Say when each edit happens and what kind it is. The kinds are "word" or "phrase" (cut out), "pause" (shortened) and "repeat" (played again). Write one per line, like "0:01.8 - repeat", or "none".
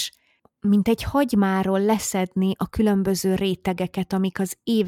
none

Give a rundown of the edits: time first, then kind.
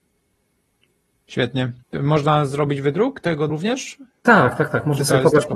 0:01.8 - pause
0:03.5 - word

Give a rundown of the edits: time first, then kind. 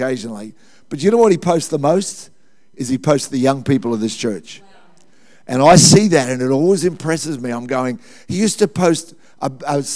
none

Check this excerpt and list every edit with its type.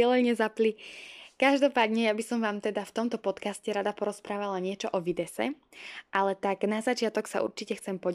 none

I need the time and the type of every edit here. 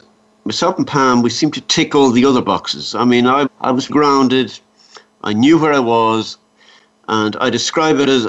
0:03.5 - word
0:03.9 - word

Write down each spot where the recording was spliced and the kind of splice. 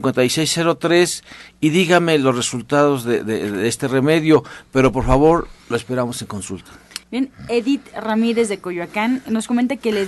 0:05.6 - pause
0:07.0 - pause

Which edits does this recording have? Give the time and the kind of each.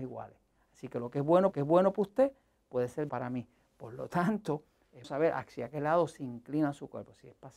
0:01.5 - repeat
0:03.1 - word
0:05.0 - word

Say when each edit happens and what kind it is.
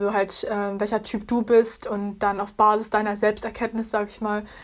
none

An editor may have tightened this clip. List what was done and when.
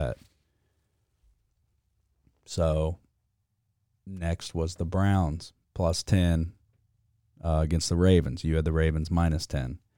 none

